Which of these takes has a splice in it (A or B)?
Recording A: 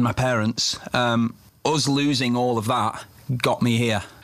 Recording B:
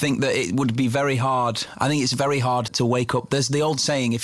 B